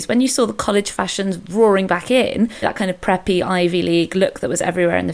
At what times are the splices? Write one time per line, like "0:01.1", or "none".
none